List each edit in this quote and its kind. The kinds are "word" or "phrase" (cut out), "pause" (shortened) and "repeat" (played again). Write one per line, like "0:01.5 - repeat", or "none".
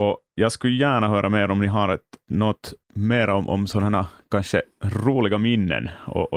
0:02.8 - pause
0:04.7 - pause